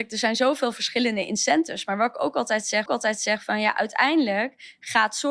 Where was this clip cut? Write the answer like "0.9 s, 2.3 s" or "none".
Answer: 2.9 s